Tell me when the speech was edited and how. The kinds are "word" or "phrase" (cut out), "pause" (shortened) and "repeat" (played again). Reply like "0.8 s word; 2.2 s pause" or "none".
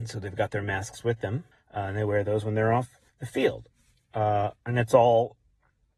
1.5 s pause; 3.1 s pause; 4.6 s pause